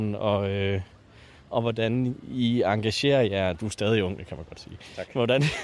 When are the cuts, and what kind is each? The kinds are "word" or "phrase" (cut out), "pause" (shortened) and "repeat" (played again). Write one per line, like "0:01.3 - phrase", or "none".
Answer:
none

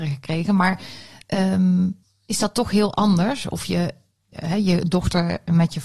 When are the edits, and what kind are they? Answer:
0:02.0 - pause
0:04.3 - word

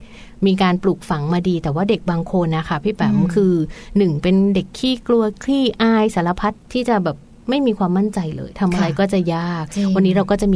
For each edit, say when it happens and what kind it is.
none

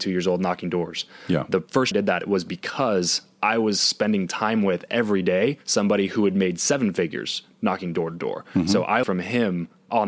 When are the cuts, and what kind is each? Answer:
0:01.9 - phrase
0:09.0 - word

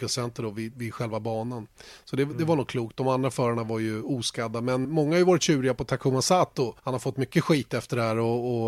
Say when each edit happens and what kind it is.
0:04.8 - word
0:06.8 - pause

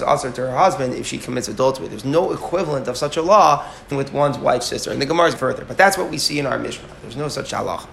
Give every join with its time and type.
0:03.9 - word
0:05.4 - phrase

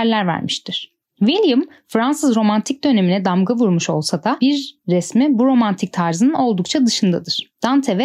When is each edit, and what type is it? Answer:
none

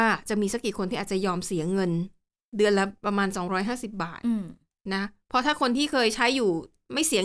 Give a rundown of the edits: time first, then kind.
none

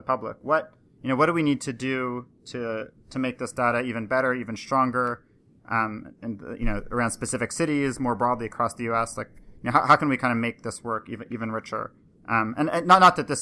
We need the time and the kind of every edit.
none

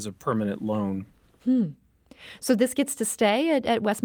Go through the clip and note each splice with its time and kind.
none

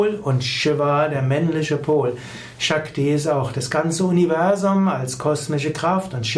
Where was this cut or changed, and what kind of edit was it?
none

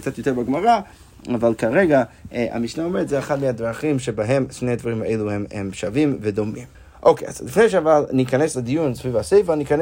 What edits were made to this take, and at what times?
0:06.7 - pause

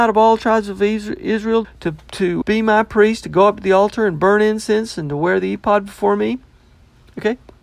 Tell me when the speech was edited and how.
0:01.6 - word
0:02.4 - word

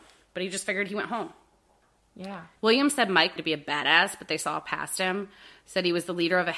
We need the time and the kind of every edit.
0:02.6 - pause
0:03.4 - word

